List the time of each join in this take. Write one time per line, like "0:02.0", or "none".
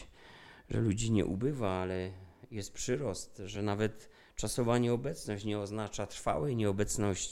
none